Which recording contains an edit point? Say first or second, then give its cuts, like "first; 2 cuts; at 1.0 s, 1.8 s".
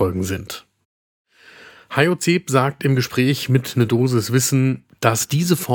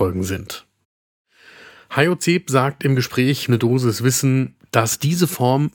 second; 1 cut; at 3.5 s